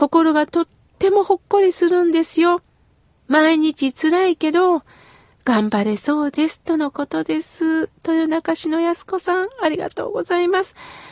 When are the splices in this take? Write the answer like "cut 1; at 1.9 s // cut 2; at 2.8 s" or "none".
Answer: none